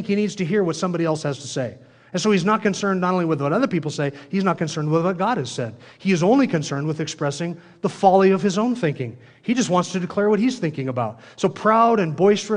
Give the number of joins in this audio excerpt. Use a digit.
0